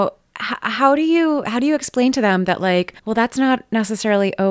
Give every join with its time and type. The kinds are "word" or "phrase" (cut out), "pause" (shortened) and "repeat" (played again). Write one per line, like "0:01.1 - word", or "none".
0:03.0 - pause